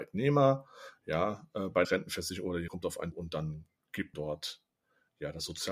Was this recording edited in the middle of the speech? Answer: yes; 4 cuts; at 1.8 s, 2.7 s, 3.1 s, 4.1 s

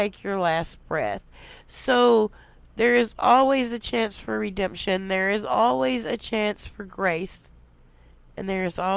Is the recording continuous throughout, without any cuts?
yes; 0 cuts

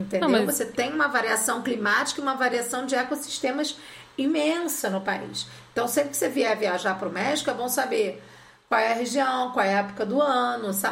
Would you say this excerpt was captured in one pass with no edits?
yes; 0 cuts

